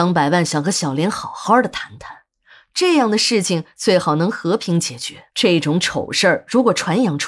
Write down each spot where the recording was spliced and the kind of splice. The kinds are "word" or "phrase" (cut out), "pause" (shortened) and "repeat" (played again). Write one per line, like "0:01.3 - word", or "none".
0:05.3 - pause